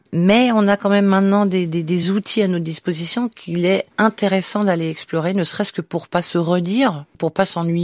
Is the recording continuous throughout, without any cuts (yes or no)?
yes